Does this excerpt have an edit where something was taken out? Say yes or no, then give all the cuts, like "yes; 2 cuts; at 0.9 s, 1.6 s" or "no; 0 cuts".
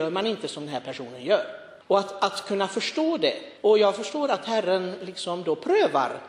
yes; 2 cuts; at 1.8 s, 3.6 s